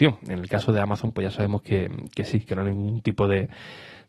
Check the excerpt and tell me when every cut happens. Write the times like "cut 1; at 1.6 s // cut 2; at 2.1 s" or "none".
none